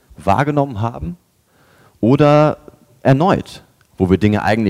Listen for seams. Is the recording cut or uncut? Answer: uncut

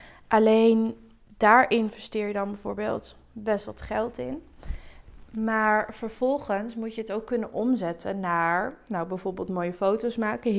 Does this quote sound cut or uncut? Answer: uncut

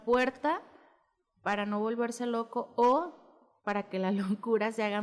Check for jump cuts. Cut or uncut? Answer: cut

